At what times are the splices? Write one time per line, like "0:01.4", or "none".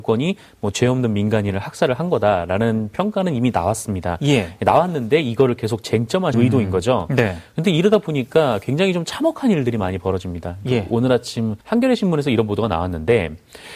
0:06.3
0:11.6